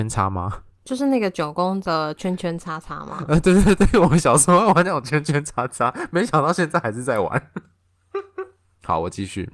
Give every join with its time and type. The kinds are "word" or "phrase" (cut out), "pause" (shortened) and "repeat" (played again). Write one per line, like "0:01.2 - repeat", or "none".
none